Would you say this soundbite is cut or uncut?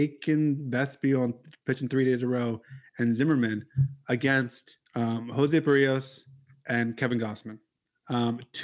cut